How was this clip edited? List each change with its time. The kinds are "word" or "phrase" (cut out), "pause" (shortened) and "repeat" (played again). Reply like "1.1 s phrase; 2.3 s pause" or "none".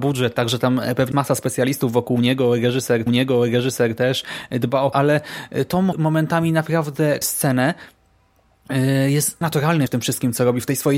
1.1 s word; 3.1 s repeat; 4.9 s phrase; 5.9 s word; 7.2 s word; 9.4 s word; 9.9 s word

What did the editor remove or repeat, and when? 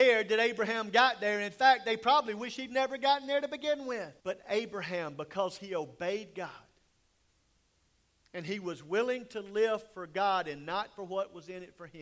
4.2 s pause

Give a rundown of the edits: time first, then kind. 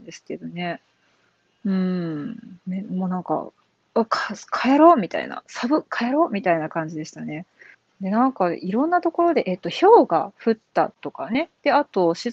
7.7 s pause

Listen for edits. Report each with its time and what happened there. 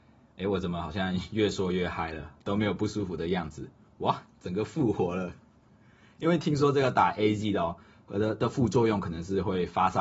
none

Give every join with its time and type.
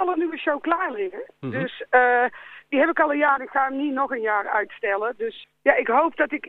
3.4 s word; 5.4 s word

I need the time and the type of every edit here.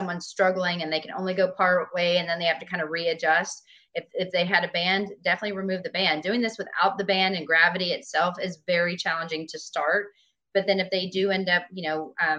none

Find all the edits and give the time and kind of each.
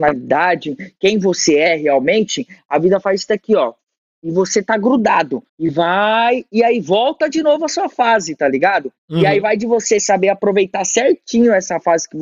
5.5 s pause; 9.0 s pause

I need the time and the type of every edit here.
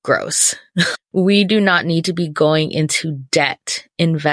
1.0 s word

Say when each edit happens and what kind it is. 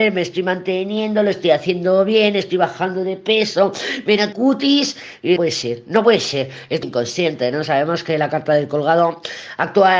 4.3 s word; 5.4 s word; 6.8 s word

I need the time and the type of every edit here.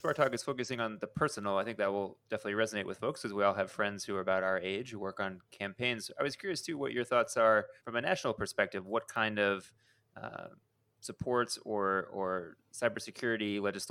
7.8 s pause

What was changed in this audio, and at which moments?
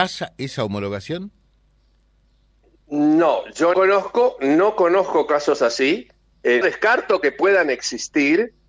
3.7 s word; 6.6 s word

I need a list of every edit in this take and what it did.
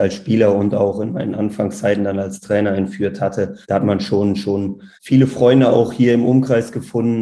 3.6 s pause; 5.0 s pause

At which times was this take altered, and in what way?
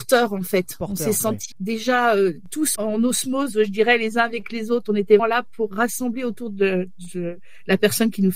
1.5 s word; 2.8 s word; 5.2 s word

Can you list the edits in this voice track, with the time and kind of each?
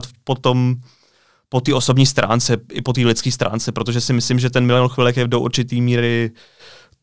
none

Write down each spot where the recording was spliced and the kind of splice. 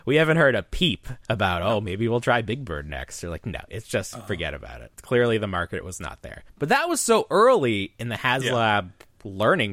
1.2 s pause; 4.9 s pause; 6.5 s pause

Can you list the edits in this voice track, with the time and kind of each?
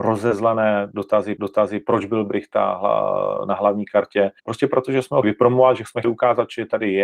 1.4 s repeat; 4.4 s pause; 5.2 s word; 6.0 s word

